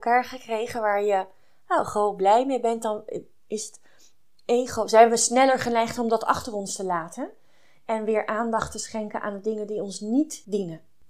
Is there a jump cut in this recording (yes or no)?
no